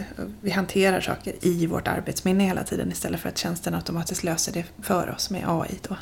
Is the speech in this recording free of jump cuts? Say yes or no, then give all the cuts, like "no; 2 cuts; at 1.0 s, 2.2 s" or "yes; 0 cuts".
yes; 0 cuts